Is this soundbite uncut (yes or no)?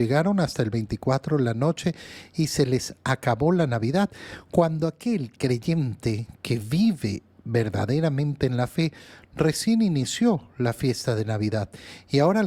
yes